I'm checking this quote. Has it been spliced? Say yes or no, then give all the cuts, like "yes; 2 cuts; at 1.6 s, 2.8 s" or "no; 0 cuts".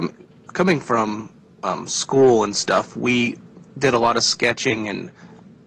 no; 0 cuts